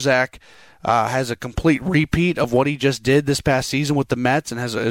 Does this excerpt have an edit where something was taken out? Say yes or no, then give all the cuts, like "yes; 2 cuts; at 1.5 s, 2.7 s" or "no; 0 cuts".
no; 0 cuts